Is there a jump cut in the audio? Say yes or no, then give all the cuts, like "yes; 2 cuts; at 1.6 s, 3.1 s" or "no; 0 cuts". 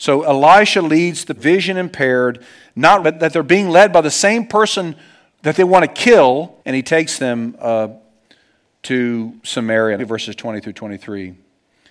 yes; 5 cuts; at 1.4 s, 3.0 s, 6.6 s, 9.4 s, 10.0 s